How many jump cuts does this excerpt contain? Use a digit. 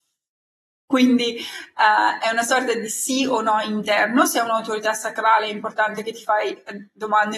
0